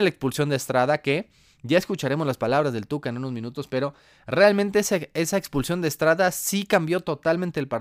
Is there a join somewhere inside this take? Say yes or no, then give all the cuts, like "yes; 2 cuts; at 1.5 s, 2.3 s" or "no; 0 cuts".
no; 0 cuts